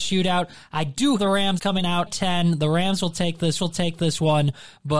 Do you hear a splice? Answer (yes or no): yes